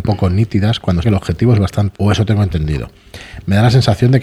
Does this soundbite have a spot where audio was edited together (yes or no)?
yes